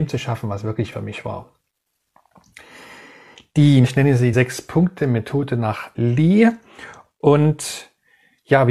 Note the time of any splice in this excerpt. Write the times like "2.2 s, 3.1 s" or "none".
0.9 s, 3.8 s, 4.3 s, 5.9 s